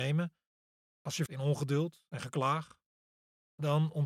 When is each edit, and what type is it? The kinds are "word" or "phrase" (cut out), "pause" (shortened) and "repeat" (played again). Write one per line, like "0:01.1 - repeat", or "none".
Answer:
0:01.3 - word